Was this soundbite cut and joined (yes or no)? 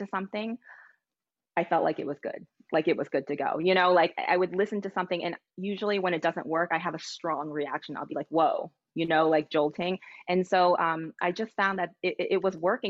no